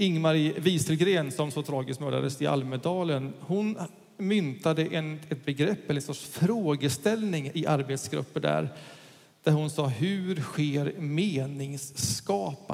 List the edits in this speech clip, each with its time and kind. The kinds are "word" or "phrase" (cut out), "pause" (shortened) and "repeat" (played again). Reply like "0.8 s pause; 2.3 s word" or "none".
none